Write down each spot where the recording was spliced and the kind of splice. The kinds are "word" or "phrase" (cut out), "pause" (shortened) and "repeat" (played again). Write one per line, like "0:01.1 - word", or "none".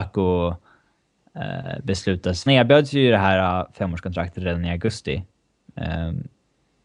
0:02.5 - phrase